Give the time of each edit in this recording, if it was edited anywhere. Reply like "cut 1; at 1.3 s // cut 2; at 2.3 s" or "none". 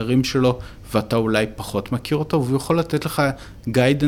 none

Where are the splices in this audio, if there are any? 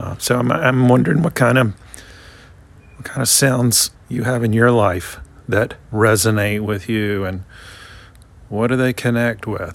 cut 1; at 3.9 s // cut 2; at 5.8 s

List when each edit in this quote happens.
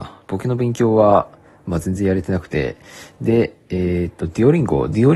none

